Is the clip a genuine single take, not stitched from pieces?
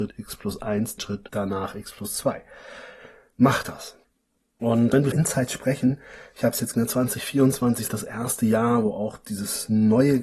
no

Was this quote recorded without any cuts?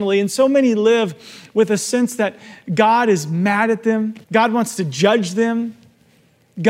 no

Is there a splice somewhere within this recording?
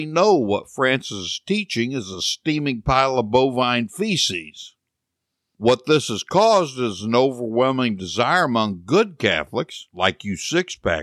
no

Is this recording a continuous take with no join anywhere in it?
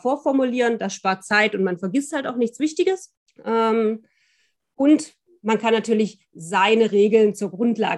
no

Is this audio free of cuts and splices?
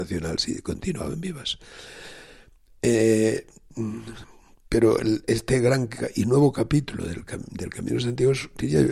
yes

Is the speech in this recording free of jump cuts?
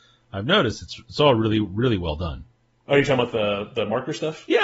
yes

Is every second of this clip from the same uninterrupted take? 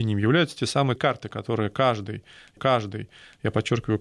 no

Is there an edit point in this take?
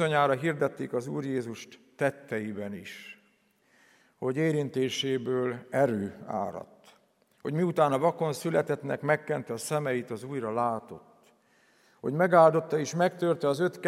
no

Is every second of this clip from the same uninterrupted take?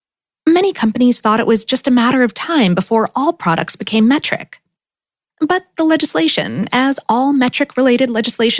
yes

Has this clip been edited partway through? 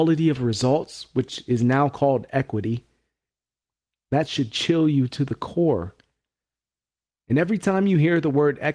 no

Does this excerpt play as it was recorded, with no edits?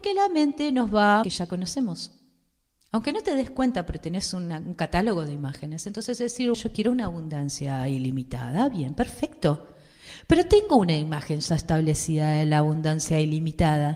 no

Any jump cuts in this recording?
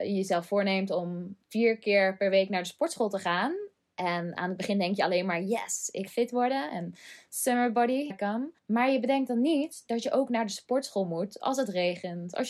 yes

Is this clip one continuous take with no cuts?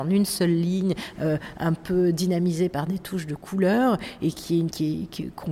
yes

